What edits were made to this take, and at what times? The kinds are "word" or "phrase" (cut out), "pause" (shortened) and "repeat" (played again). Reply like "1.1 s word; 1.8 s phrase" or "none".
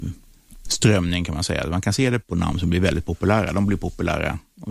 2.2 s word